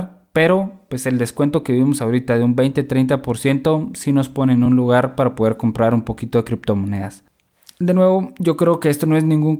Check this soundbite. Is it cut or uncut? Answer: uncut